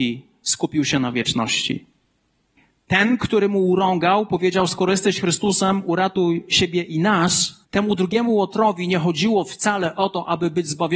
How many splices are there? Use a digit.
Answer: 2